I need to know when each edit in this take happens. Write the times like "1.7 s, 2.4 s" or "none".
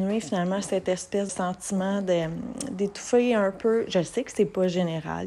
1.3 s